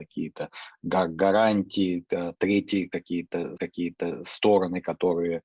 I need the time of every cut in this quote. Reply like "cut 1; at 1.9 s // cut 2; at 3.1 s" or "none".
cut 1; at 3.6 s